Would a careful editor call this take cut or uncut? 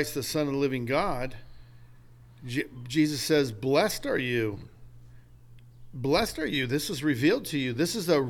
uncut